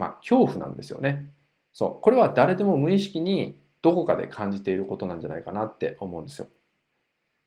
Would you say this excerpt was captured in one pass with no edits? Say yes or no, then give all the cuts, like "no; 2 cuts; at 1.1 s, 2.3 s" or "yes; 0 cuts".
yes; 0 cuts